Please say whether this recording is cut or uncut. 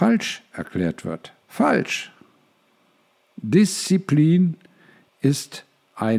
cut